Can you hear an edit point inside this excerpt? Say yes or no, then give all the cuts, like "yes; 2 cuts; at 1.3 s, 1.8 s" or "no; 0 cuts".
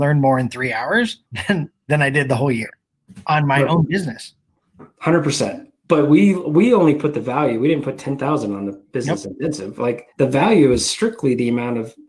yes; 2 cuts; at 1.3 s, 10.1 s